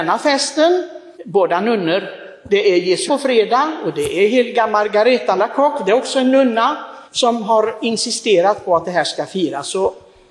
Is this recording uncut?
no; 4 cuts; at 1.1 s, 3.1 s, 5.4 s, 7.0 s

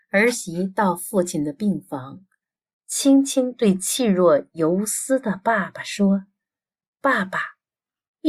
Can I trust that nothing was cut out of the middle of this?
yes; 0 cuts

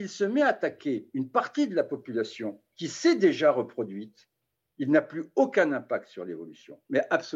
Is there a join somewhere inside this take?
no; 0 cuts

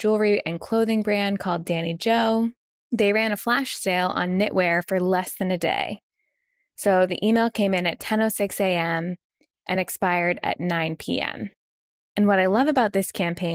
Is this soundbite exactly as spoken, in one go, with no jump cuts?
yes; 0 cuts

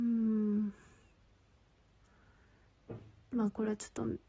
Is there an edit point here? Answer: no; 0 cuts

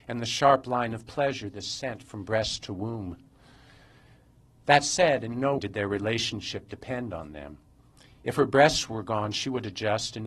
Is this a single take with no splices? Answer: no; 1 cut; at 5.6 s

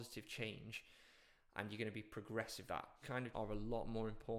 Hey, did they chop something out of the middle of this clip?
yes; 3 cuts; at 2.7 s, 3.0 s, 3.3 s

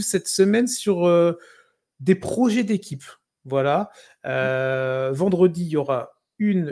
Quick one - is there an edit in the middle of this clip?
no; 0 cuts

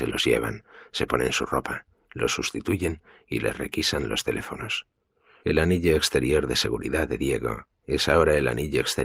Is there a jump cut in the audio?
no; 0 cuts

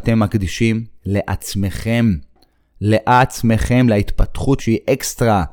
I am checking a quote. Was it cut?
yes; 1 cut; at 4.6 s

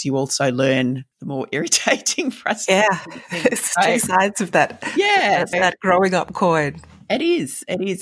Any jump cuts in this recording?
yes; 1 cut; at 5.5 s

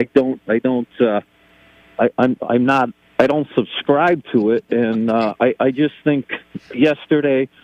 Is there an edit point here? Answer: no; 0 cuts

